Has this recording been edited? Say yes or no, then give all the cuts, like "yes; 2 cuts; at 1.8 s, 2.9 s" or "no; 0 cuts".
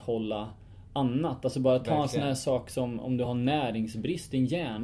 no; 0 cuts